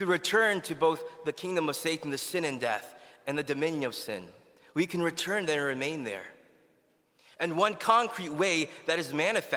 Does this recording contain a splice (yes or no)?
no